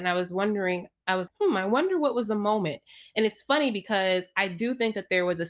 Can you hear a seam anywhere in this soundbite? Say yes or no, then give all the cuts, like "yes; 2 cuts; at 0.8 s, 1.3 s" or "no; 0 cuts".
yes; 1 cut; at 1.3 s